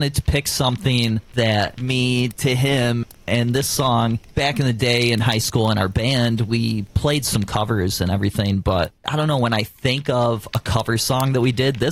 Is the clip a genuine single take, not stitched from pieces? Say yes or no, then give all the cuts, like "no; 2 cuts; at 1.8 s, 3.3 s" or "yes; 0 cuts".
no; 2 cuts; at 1.8 s, 9.0 s